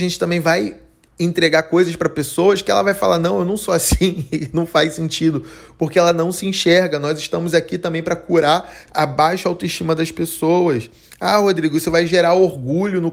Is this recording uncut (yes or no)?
yes